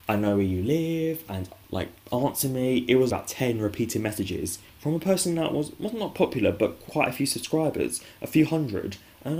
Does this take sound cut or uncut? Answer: cut